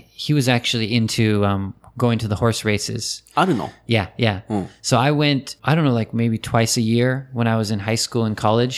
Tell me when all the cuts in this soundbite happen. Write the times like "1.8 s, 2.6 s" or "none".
5.6 s